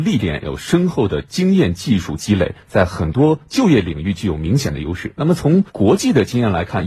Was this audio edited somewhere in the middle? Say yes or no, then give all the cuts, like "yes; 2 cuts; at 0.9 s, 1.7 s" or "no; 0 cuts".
yes; 1 cut; at 5.7 s